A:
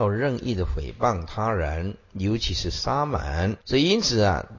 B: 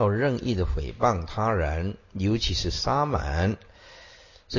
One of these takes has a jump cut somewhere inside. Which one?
A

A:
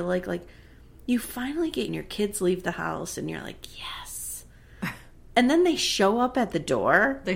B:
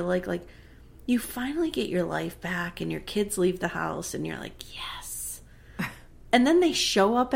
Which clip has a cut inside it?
A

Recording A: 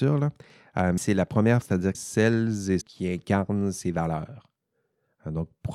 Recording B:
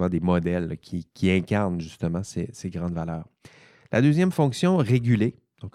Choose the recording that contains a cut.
A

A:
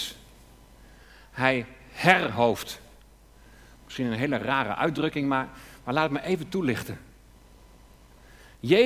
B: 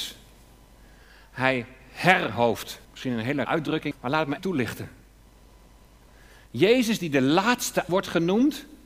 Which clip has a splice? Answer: B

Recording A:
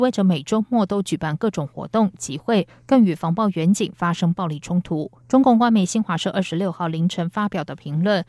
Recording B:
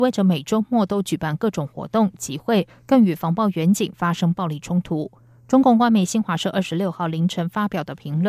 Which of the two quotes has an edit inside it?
A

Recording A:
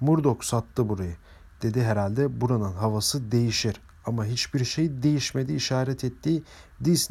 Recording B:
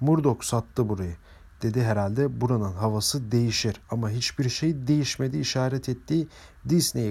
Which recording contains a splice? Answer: B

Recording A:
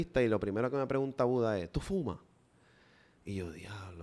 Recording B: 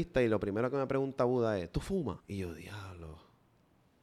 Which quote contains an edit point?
B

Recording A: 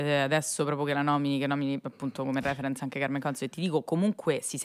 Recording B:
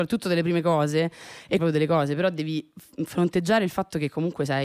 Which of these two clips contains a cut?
B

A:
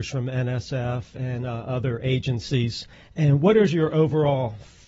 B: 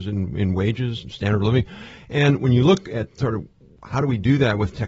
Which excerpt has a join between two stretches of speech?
A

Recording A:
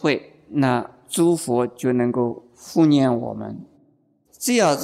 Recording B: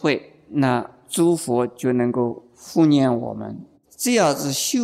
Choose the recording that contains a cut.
B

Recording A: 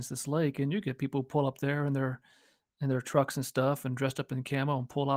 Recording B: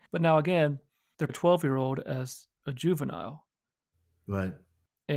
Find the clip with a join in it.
B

